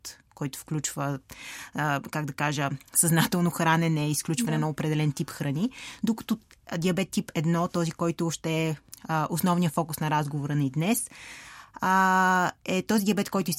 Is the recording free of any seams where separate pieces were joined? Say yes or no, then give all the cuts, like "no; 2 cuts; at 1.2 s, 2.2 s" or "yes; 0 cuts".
yes; 0 cuts